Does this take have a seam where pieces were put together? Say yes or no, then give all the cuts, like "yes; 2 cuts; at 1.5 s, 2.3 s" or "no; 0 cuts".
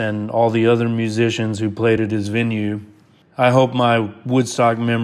no; 0 cuts